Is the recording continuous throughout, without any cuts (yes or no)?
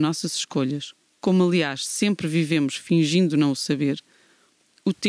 yes